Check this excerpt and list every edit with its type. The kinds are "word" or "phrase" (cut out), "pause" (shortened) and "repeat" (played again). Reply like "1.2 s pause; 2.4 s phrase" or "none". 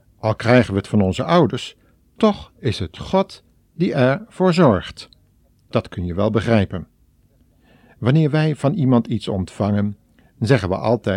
none